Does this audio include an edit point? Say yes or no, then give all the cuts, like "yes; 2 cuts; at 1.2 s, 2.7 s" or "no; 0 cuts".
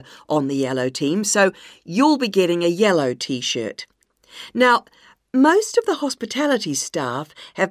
no; 0 cuts